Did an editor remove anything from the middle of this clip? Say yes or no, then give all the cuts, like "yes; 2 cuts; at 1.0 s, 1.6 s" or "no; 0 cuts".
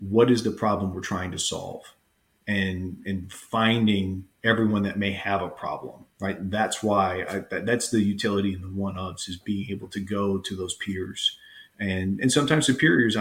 yes; 1 cut; at 6.1 s